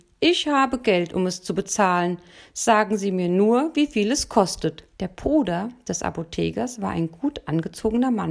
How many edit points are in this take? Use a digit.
1